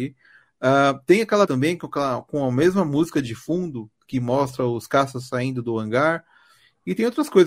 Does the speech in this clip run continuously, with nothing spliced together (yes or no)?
no